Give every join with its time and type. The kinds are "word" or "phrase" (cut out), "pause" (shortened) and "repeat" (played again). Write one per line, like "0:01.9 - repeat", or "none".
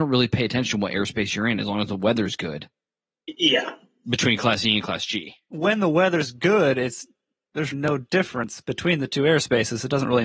0:07.7 - word